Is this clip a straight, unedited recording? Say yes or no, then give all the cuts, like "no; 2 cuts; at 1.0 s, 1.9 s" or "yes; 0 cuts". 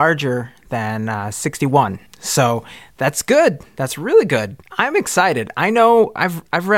no; 2 cuts; at 2.1 s, 4.6 s